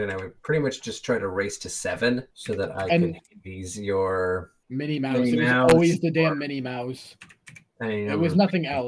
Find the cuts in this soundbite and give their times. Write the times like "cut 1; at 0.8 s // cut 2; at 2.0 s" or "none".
cut 1; at 2.3 s // cut 2; at 4.6 s